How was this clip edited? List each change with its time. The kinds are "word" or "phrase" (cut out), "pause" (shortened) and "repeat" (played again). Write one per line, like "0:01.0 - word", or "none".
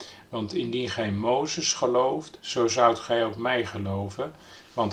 none